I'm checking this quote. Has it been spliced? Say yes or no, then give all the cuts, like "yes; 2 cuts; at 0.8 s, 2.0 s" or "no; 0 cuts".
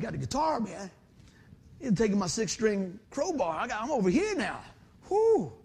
yes; 1 cut; at 3.0 s